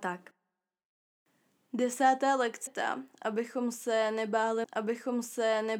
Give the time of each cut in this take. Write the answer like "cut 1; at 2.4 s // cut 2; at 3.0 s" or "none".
cut 1; at 2.7 s // cut 2; at 4.6 s